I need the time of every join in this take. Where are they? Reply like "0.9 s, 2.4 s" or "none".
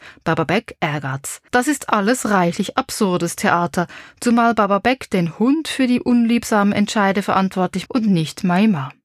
1.5 s, 7.9 s